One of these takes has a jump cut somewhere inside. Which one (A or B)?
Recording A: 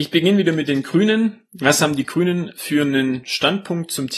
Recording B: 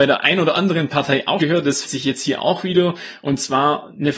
B